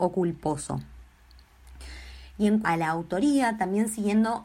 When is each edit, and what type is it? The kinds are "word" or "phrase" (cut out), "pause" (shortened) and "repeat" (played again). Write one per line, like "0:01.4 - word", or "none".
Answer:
0:02.6 - word